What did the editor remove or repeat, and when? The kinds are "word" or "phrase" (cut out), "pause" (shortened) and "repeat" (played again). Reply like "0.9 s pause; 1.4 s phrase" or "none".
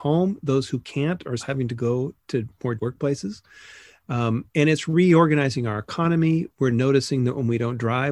1.4 s word; 2.8 s word; 4.5 s pause